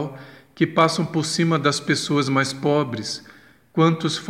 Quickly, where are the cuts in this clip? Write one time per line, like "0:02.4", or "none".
none